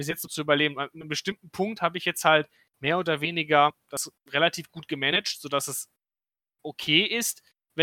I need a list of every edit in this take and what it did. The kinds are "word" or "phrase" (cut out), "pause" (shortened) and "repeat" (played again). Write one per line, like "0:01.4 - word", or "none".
none